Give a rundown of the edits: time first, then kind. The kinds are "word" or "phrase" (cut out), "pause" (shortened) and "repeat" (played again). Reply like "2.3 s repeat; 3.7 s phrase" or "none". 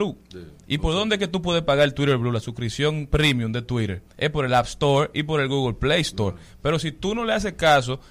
4.1 s pause